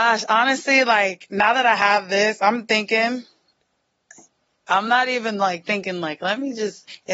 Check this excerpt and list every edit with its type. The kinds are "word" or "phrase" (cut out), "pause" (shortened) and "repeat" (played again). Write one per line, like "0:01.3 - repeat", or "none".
none